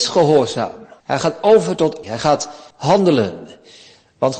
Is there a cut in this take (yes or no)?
yes